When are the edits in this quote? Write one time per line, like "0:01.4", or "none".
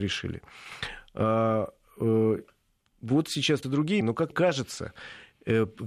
0:03.6
0:04.0
0:04.3